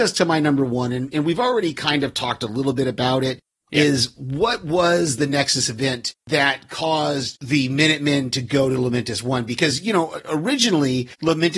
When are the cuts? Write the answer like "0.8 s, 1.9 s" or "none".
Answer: none